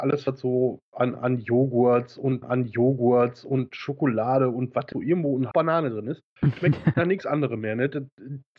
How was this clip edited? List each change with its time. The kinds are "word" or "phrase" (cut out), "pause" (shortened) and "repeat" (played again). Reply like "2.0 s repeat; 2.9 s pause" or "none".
2.4 s repeat; 4.9 s phrase; 5.5 s word; 6.6 s word; 6.9 s word